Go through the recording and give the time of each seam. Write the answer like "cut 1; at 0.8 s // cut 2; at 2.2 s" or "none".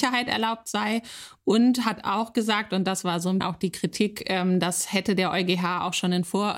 cut 1; at 3.4 s